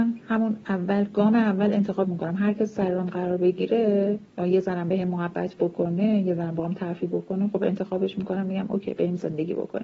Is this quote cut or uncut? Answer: cut